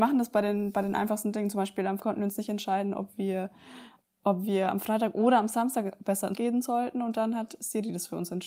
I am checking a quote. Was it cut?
yes; 2 cuts; at 2.0 s, 6.3 s

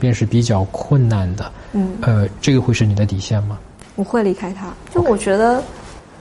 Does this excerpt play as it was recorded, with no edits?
yes; 0 cuts

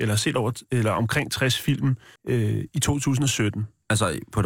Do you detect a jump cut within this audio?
yes; 1 cut; at 2.2 s

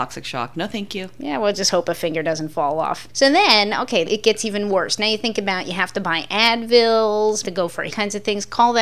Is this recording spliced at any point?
yes; 3 cuts; at 4.1 s, 7.4 s, 7.9 s

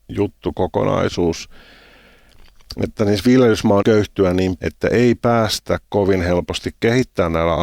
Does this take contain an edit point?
yes; 2 cuts; at 3.8 s, 4.6 s

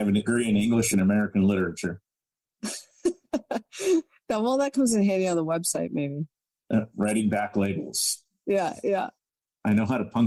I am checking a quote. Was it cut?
no; 0 cuts

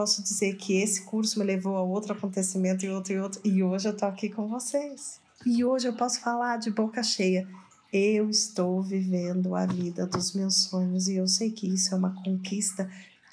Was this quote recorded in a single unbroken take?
no; 1 cut; at 5.3 s

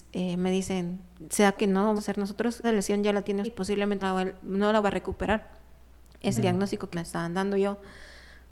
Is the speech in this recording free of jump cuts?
no; 8 cuts; at 1.6 s, 2.0 s, 2.6 s, 3.4 s, 4.0 s, 4.8 s, 6.4 s, 6.9 s

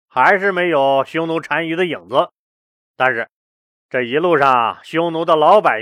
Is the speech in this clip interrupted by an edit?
no; 0 cuts

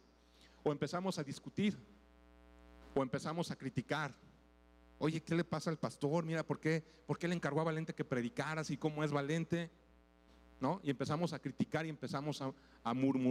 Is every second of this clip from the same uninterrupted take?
yes; 0 cuts

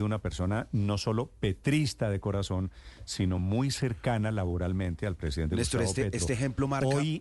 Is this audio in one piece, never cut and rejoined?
yes; 0 cuts

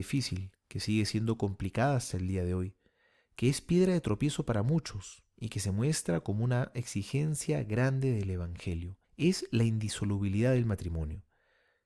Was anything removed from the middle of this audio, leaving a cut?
yes; 1 cut; at 9.0 s

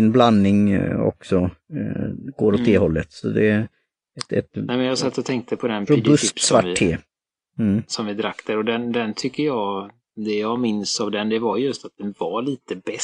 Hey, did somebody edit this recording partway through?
no; 0 cuts

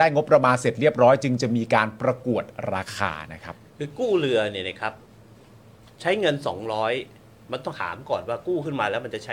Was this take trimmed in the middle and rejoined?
no; 0 cuts

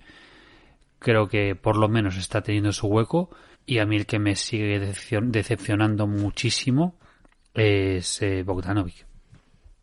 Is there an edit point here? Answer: yes; 1 cut; at 3.5 s

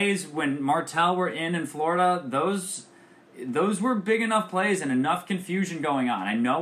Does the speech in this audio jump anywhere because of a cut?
no; 0 cuts

